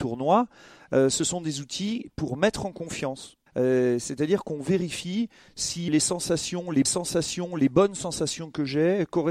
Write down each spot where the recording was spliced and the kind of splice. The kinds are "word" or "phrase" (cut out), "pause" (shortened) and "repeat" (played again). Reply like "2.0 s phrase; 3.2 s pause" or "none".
3.5 s pause; 5.9 s word; 6.8 s repeat